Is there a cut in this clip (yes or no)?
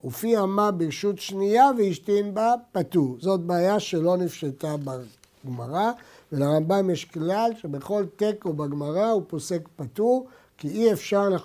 no